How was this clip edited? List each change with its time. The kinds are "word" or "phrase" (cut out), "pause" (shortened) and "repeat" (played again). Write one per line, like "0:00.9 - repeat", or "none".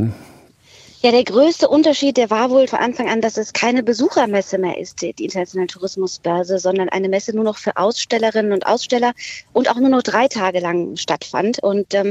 0:02.7 - word